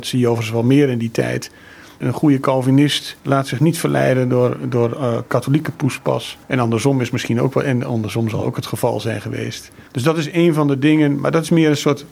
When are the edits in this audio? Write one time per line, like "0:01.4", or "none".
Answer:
0:06.4
0:09.9